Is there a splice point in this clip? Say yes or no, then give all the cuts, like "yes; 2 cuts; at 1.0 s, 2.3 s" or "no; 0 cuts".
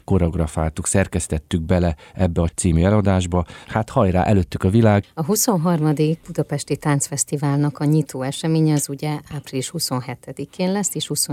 yes; 1 cut; at 2.5 s